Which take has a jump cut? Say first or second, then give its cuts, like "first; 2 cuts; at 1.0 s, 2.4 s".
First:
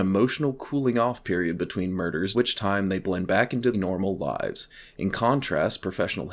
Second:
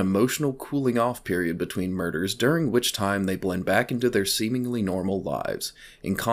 first; 2 cuts; at 2.3 s, 3.7 s